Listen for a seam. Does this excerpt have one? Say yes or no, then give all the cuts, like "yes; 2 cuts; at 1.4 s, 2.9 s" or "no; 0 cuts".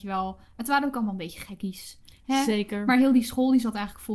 no; 0 cuts